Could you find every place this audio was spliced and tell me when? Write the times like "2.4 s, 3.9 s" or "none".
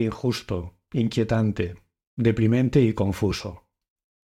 none